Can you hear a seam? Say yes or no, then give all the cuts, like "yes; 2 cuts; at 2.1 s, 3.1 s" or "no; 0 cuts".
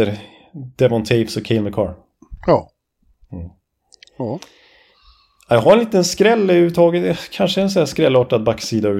no; 0 cuts